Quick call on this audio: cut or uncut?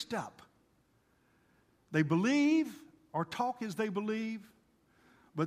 uncut